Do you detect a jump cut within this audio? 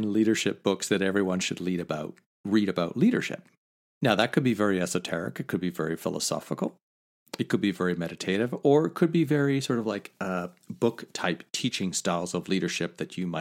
no; 0 cuts

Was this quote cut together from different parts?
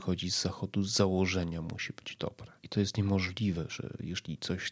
yes; 1 cut; at 2.6 s

